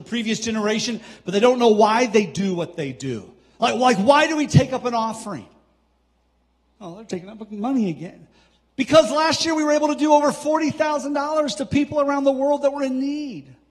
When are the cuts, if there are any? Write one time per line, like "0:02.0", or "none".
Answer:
none